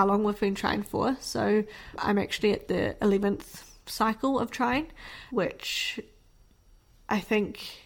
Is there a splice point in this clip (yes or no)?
no